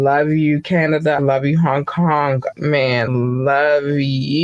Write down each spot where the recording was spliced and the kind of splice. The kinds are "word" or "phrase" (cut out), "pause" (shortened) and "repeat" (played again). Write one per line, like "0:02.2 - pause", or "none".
0:01.2 - word
0:02.5 - word
0:03.1 - word